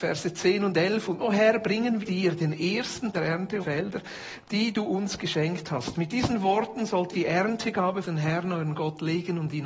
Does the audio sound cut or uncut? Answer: cut